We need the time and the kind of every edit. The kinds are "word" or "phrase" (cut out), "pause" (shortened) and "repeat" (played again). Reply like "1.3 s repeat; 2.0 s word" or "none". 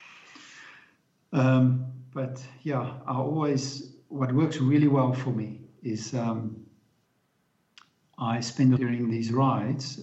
8.8 s phrase